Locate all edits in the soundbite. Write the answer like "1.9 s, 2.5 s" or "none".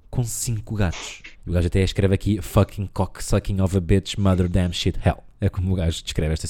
1.3 s